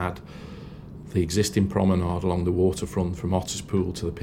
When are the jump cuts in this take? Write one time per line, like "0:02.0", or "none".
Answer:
none